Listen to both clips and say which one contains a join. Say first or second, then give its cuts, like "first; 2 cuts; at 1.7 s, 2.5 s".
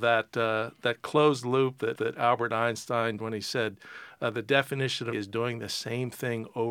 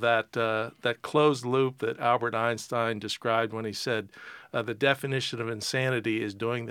first; 3 cuts; at 2.0 s, 3.2 s, 5.1 s